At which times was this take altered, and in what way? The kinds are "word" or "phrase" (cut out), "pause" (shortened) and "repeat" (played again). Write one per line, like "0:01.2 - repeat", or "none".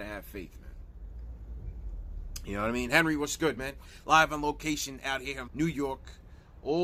0:05.5 - word